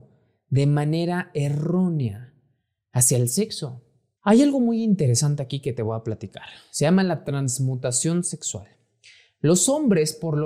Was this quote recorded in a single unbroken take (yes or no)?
yes